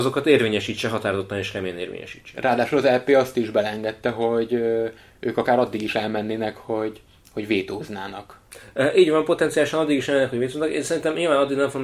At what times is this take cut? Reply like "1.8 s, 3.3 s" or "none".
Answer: none